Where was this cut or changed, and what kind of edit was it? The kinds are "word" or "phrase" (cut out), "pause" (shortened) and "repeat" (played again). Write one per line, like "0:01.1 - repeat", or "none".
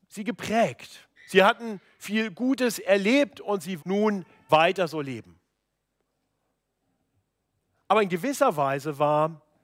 0:01.2 - pause
0:03.8 - word
0:04.5 - word